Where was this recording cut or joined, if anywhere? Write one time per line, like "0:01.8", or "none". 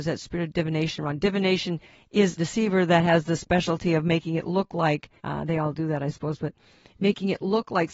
0:02.4
0:05.2